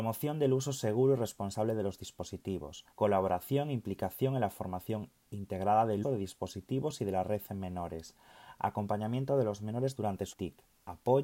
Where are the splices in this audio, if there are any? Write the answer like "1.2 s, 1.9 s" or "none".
2.9 s, 6.0 s, 10.3 s